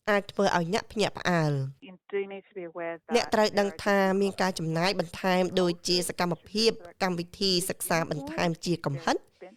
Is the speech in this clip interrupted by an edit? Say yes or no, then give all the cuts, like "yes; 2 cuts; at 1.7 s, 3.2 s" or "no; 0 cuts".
no; 0 cuts